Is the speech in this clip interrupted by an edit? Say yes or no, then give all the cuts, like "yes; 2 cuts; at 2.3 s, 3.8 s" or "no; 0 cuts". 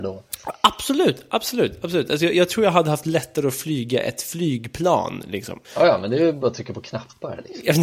yes; 1 cut; at 5.6 s